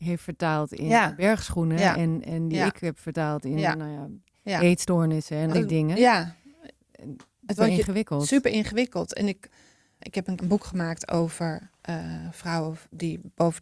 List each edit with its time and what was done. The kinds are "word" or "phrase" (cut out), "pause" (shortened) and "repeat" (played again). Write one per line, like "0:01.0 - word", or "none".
0:05.5 - word
0:07.6 - phrase
0:10.0 - word
0:10.4 - word
0:11.8 - pause